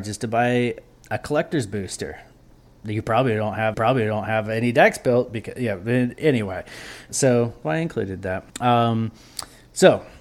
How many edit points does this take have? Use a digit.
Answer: 4